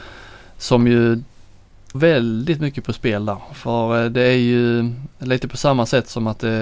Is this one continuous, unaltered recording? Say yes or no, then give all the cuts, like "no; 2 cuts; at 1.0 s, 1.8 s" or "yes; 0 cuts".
no; 1 cut; at 1.9 s